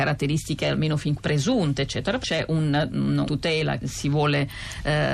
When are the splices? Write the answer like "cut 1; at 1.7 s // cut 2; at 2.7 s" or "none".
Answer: cut 1; at 1.2 s // cut 2; at 2.2 s // cut 3; at 3.3 s // cut 4; at 3.8 s